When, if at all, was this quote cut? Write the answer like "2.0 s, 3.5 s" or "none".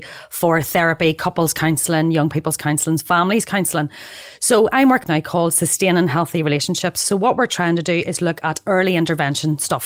5.0 s

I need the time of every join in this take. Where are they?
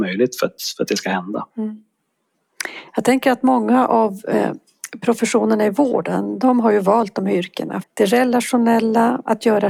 1.5 s, 7.8 s

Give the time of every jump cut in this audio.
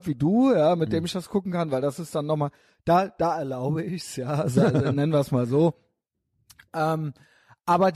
none

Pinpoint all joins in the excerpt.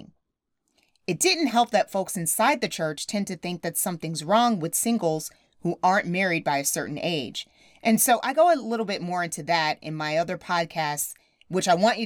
none

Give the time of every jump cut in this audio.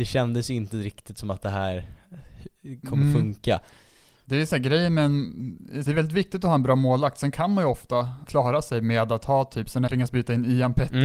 5.9 s, 8.3 s, 9.9 s

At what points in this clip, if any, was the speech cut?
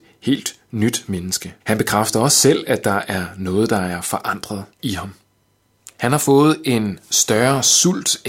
1.6 s, 4.7 s, 5.9 s

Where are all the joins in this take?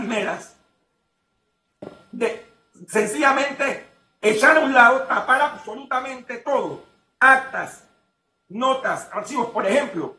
none

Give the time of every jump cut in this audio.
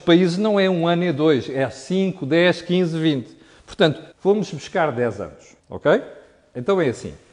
4.1 s, 5.6 s

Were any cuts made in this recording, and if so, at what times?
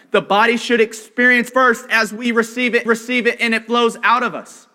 1.5 s, 2.9 s

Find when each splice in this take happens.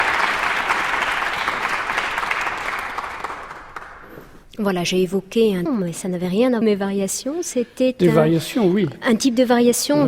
5.7 s, 6.6 s

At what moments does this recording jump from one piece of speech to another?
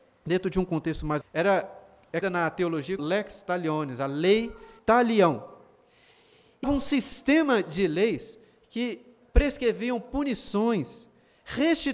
1.2 s, 2.2 s, 3.0 s, 4.8 s, 6.6 s

